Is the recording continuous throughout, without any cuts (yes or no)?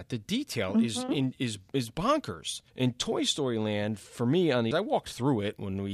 no